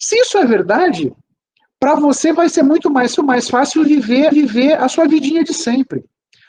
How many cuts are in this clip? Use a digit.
2